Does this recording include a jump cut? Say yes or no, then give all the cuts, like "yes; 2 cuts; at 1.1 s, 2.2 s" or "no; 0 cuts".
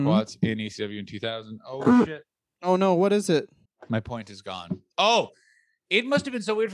no; 0 cuts